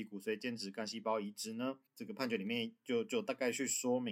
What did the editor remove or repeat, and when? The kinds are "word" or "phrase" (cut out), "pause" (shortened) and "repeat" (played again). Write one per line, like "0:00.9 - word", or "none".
0:01.9 - pause

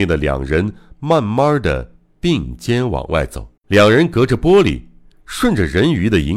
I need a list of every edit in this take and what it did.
0:03.6 - pause

